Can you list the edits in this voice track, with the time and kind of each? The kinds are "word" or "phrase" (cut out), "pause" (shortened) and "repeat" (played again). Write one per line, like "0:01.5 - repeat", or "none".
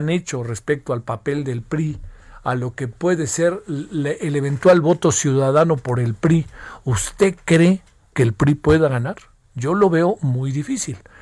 none